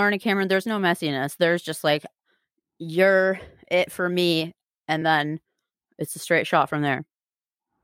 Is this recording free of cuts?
yes; 0 cuts

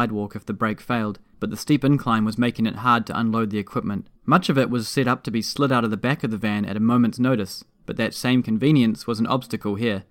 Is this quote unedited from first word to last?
no; 2 cuts; at 1.3 s, 4.2 s

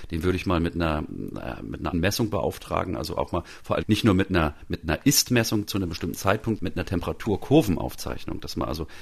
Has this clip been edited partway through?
yes; 4 cuts; at 1.9 s, 3.8 s, 5.7 s, 6.6 s

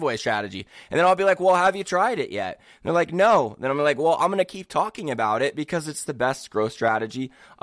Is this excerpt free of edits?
yes; 0 cuts

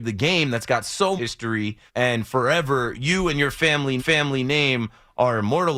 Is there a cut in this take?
yes; 4 cuts; at 1.2 s, 1.9 s, 2.9 s, 4.0 s

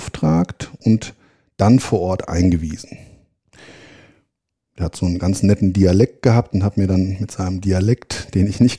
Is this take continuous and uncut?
yes; 0 cuts

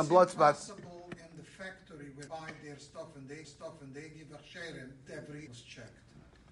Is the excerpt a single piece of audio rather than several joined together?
no; 4 cuts; at 2.3 s, 3.4 s, 5.1 s, 5.5 s

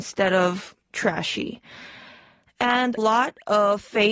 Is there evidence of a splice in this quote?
yes; 1 cut; at 3.0 s

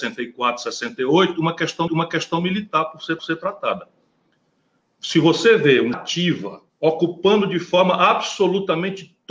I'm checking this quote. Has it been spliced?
yes; 4 cuts; at 1.9 s, 3.2 s, 5.9 s, 6.7 s

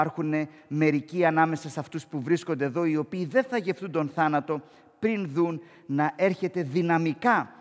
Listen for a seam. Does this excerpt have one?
no; 0 cuts

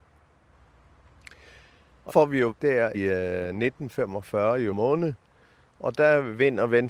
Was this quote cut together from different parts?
yes; 4 cuts; at 2.1 s, 2.5 s, 2.9 s, 4.7 s

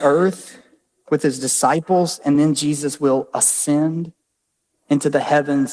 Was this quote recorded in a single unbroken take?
yes; 0 cuts

